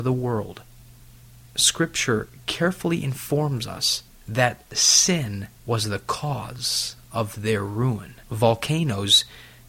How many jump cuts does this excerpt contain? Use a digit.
3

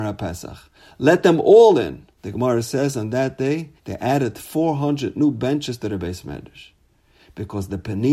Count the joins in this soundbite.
2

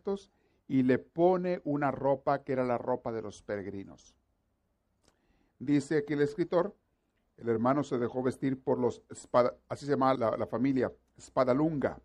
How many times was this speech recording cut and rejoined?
1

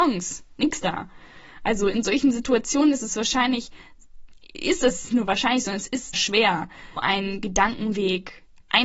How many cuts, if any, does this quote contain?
3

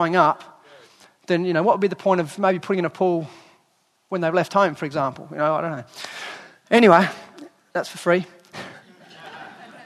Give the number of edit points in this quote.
0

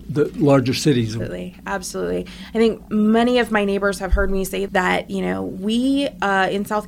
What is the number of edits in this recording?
1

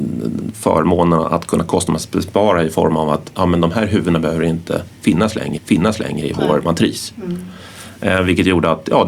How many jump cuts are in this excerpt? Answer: 1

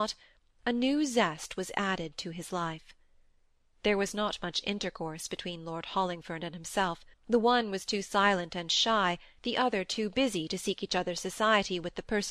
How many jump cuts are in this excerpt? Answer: 1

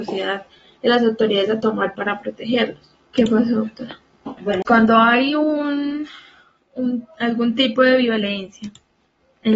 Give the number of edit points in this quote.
3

